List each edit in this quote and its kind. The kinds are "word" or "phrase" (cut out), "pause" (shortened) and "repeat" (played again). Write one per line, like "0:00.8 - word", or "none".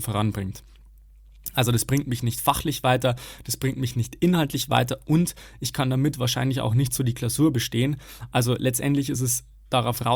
none

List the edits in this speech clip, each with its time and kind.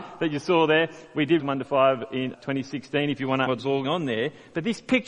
0:01.4 - word
0:02.3 - word
0:03.5 - word
0:03.8 - word

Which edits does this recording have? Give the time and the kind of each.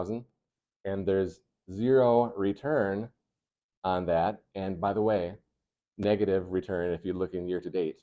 none

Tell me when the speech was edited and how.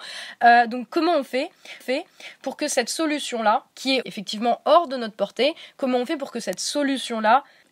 0:01.8 - repeat
0:03.7 - pause
0:04.0 - word

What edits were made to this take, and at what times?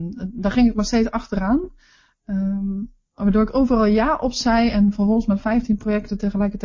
none

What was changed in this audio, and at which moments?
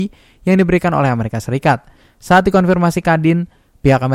none

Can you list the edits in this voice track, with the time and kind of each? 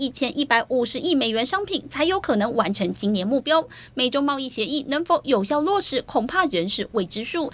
none

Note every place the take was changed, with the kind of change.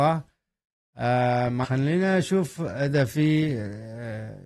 0:01.6 - word

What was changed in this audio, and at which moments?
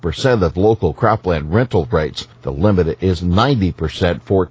0:02.3 - pause

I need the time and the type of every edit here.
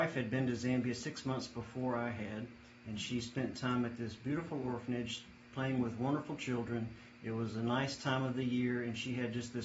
none

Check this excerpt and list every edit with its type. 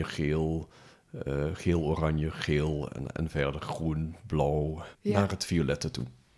0:04.9 - pause

